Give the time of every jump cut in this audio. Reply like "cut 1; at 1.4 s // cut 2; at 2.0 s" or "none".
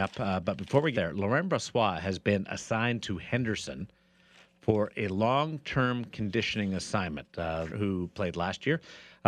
cut 1; at 0.9 s // cut 2; at 7.7 s